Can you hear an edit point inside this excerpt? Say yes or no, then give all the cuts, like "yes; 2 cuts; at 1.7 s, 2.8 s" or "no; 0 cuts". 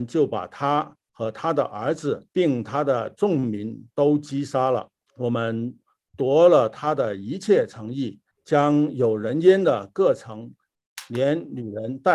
yes; 3 cuts; at 2.3 s, 5.0 s, 8.3 s